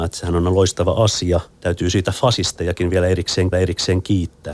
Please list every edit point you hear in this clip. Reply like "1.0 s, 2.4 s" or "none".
1.5 s, 2.0 s, 3.5 s